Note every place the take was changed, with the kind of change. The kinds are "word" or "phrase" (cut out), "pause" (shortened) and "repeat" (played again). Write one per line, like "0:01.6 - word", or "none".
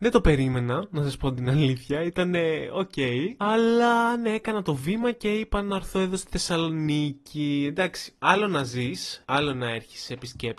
0:09.2 - pause